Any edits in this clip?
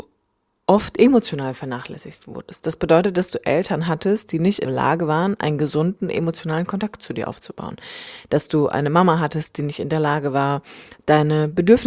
yes; 1 cut; at 4.6 s

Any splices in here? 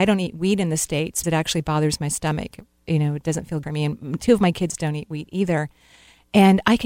yes; 2 cuts; at 1.2 s, 3.6 s

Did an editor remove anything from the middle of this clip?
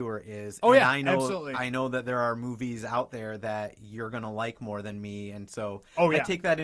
no; 0 cuts

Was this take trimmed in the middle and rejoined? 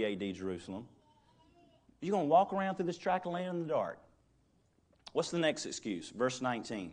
no; 0 cuts

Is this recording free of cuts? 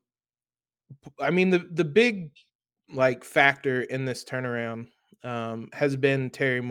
yes; 0 cuts

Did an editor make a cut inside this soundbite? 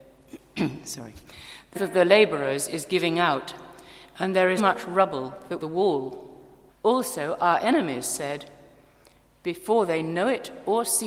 yes; 4 cuts; at 1.7 s, 4.6 s, 5.6 s, 6.7 s

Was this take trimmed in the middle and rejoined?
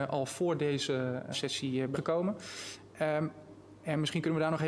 yes; 2 cuts; at 1.3 s, 1.9 s

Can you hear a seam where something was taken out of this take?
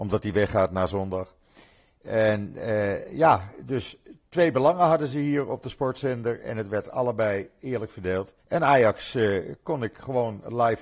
yes; 1 cut; at 8.4 s

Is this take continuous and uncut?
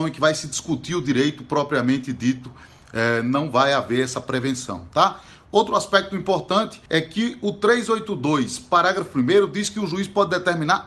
no; 1 cut; at 6.9 s

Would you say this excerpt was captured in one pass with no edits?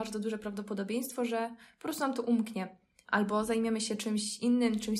yes; 0 cuts

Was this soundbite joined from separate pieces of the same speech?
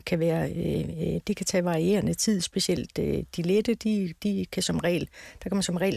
no; 0 cuts

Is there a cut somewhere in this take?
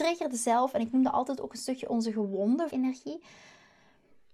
yes; 1 cut; at 2.7 s

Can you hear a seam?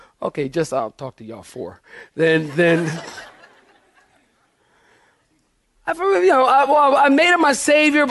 no; 0 cuts

